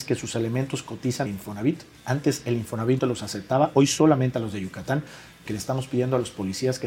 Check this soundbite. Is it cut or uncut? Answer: cut